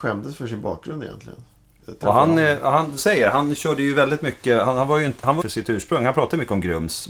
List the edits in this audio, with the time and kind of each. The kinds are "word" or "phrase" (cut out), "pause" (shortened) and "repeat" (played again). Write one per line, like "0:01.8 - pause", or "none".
0:03.0 - phrase
0:05.4 - phrase